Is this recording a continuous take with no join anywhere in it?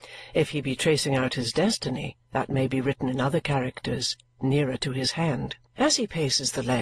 no; 2 cuts; at 2.2 s, 5.7 s

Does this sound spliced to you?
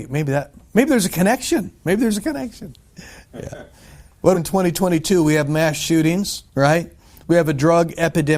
yes; 3 cuts; at 3.7 s, 4.3 s, 6.5 s

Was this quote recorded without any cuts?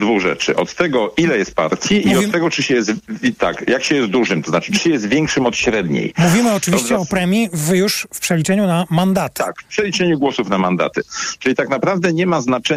yes; 0 cuts

